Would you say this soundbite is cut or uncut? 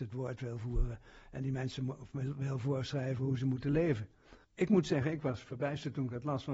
cut